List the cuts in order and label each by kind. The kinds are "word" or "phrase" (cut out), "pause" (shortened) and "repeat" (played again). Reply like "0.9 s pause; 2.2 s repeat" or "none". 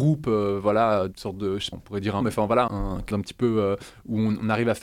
1.1 s word; 1.7 s word; 2.2 s word; 2.7 s word; 3.1 s word